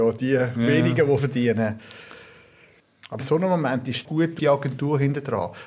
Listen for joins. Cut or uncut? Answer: cut